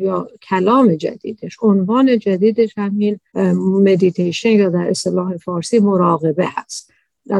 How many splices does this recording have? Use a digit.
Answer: 0